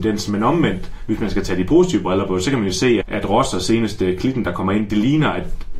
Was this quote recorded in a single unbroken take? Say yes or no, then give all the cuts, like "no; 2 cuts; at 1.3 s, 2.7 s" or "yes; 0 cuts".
no; 1 cut; at 3.0 s